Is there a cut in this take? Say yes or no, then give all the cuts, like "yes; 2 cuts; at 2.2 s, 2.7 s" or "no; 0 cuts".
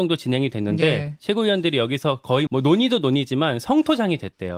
yes; 1 cut; at 2.5 s